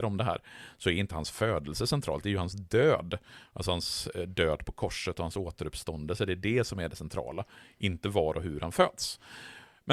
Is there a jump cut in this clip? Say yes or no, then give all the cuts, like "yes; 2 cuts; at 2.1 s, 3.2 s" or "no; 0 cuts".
no; 0 cuts